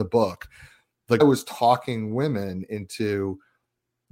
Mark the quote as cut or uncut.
cut